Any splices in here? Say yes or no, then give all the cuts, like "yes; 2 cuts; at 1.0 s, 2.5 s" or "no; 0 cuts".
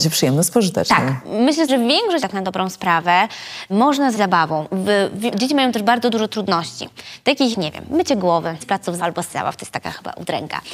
yes; 9 cuts; at 1.7 s, 2.2 s, 3.7 s, 4.1 s, 5.3 s, 7.5 s, 8.6 s, 9.0 s, 9.3 s